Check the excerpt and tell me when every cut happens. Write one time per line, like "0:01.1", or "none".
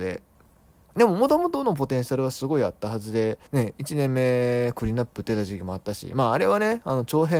0:03.5